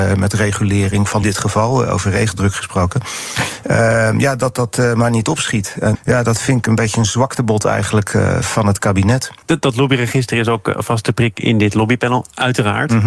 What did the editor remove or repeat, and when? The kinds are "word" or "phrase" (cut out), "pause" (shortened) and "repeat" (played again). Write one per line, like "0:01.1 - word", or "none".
0:01.2 - phrase
0:05.9 - word
0:09.4 - pause